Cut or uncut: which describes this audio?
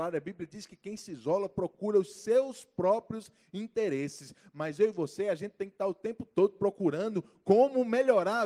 uncut